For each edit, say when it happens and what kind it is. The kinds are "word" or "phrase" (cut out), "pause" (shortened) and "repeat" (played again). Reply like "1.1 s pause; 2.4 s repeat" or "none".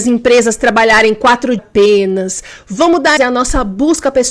1.6 s phrase; 3.2 s word

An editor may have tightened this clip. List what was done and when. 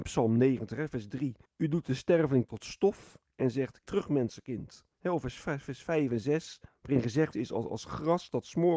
1.4 s pause; 2.5 s word; 3.3 s pause; 3.8 s word; 4.9 s pause; 6.7 s pause; 7.3 s phrase

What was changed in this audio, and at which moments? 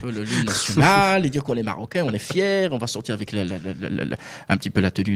none

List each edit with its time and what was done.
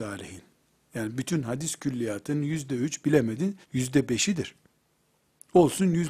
3.6 s pause

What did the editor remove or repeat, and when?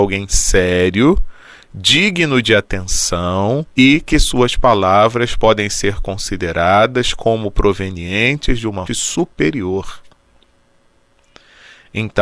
3.7 s pause; 8.9 s word

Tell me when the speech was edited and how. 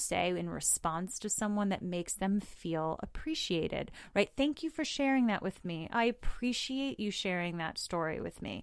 none

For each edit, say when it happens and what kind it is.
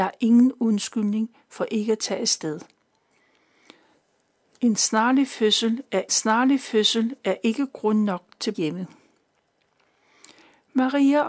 6.1 s repeat; 8.5 s word

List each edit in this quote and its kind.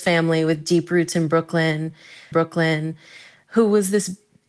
2.3 s repeat

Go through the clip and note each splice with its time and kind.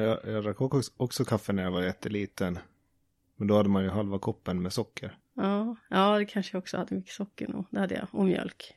5.2 s pause; 6.9 s word

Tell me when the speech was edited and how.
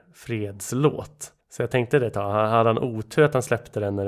1.4 s pause

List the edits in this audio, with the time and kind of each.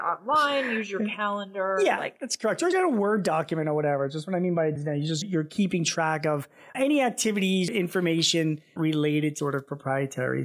2.7 s word; 4.8 s word; 5.2 s word; 6.7 s word; 7.7 s word; 8.8 s word; 9.4 s word

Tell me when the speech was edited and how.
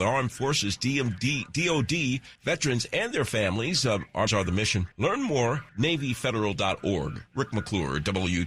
2.4 s pause; 4.3 s word; 4.9 s pause; 5.7 s word

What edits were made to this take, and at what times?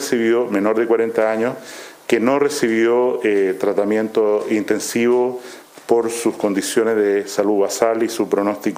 none

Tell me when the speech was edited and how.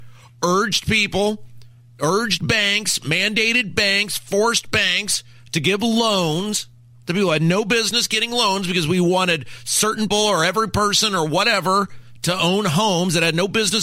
10.1 s word

